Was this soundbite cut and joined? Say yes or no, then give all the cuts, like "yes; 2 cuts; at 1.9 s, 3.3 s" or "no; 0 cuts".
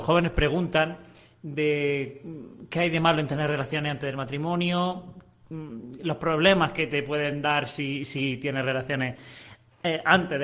no; 0 cuts